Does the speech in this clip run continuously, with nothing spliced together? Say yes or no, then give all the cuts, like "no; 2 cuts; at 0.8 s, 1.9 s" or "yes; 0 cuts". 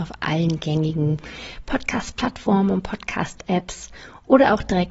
yes; 0 cuts